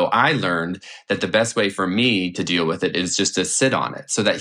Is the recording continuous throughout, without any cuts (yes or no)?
yes